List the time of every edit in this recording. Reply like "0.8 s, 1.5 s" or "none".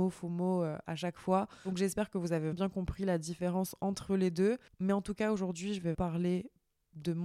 2.5 s, 5.9 s